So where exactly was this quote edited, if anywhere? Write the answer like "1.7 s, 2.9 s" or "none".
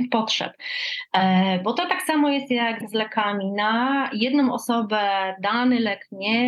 2.8 s